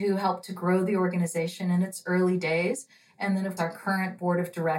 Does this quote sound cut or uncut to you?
cut